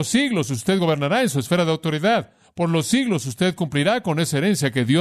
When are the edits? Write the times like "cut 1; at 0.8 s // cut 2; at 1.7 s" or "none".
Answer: none